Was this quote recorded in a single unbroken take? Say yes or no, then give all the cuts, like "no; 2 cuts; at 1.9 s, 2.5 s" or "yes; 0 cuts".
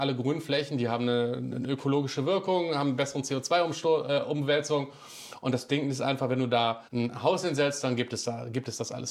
no; 1 cut; at 6.9 s